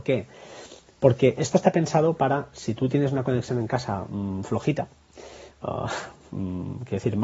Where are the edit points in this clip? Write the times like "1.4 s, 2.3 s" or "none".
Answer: none